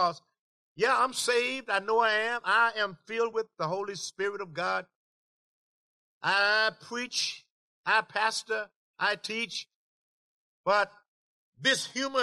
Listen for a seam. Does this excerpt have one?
no; 0 cuts

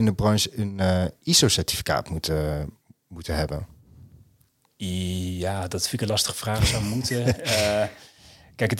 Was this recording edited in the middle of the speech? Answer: no; 0 cuts

